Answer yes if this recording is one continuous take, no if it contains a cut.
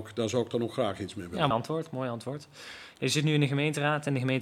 no